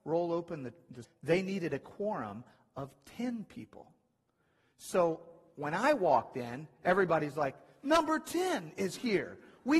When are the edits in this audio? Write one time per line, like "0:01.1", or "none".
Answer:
0:01.0